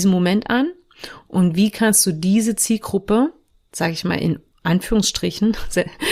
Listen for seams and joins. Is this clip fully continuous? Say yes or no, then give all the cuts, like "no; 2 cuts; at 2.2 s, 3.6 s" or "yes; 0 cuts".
yes; 0 cuts